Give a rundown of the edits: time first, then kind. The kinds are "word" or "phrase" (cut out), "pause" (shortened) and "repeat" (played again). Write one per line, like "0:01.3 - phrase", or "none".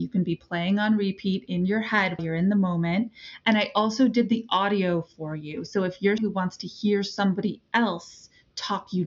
0:02.2 - word
0:06.2 - word